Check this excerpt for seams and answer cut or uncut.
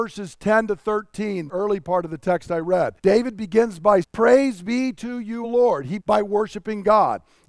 cut